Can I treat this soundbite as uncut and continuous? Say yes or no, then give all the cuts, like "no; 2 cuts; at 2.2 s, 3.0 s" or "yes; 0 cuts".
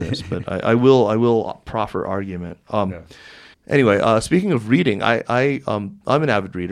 no; 1 cut; at 3.5 s